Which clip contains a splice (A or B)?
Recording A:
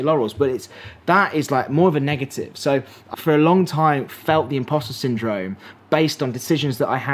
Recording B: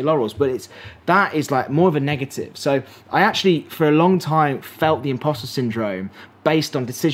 A